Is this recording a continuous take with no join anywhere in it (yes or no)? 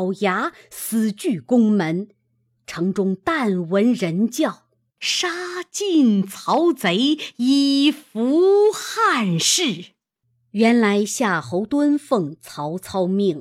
yes